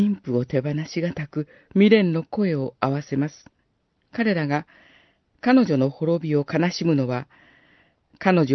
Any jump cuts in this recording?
yes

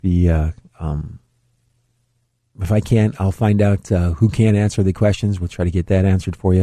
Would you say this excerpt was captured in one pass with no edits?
yes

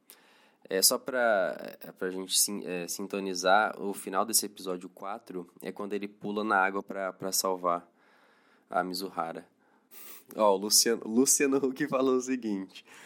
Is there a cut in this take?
no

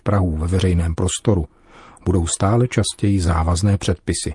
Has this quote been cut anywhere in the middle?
no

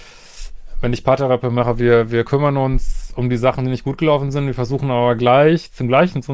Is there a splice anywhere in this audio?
no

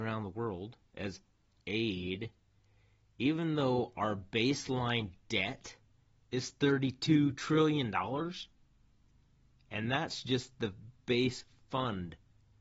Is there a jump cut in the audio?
no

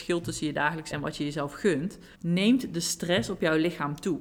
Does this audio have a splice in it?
yes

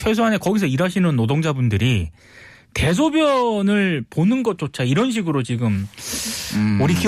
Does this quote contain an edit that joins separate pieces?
no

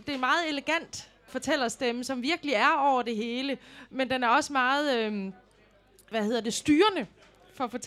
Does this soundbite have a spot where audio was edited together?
no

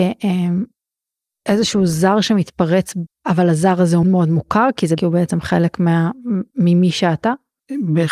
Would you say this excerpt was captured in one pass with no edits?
no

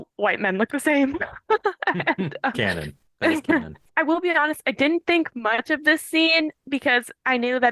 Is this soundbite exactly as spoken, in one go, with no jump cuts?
no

